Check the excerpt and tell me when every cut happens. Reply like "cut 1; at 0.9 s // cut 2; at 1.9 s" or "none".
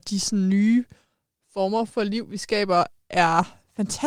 none

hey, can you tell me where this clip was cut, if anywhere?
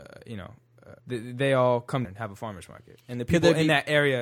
cut 1; at 1.0 s // cut 2; at 2.0 s

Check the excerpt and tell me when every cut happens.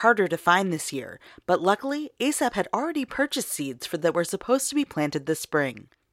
cut 1; at 4.0 s

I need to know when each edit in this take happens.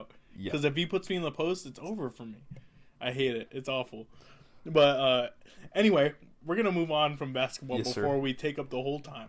none

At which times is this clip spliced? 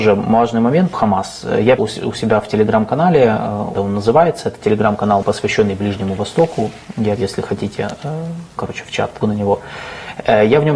cut 1; at 0.9 s // cut 2; at 1.8 s // cut 3; at 3.7 s // cut 4; at 5.2 s // cut 5; at 7.2 s // cut 6; at 8.6 s // cut 7; at 9.2 s

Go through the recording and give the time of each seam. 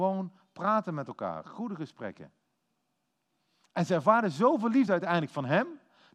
none

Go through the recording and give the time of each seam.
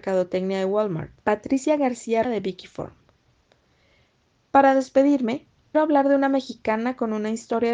cut 1; at 1.2 s // cut 2; at 2.2 s // cut 3; at 5.7 s

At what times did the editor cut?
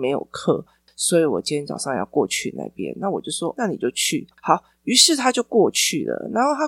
cut 1; at 3.5 s // cut 2; at 4.3 s

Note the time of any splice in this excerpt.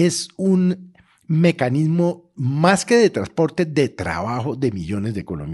none

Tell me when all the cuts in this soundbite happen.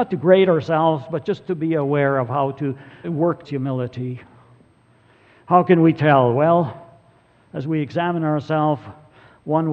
cut 1; at 3.0 s // cut 2; at 3.4 s

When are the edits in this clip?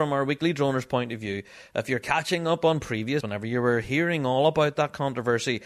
cut 1; at 3.2 s

